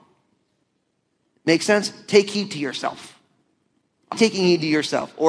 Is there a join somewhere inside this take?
yes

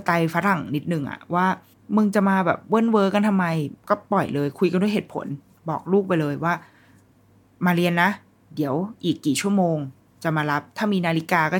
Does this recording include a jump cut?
yes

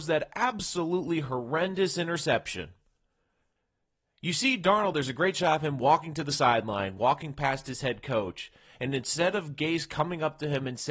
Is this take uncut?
yes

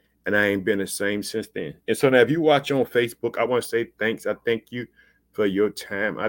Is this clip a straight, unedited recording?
yes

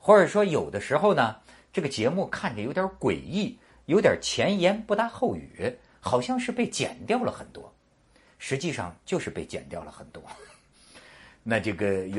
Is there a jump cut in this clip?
no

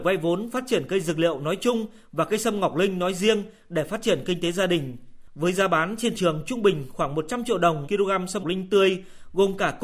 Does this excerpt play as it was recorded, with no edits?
no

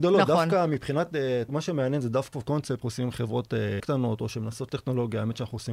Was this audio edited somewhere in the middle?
yes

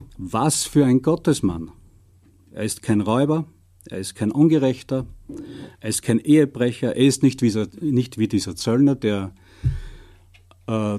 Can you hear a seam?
no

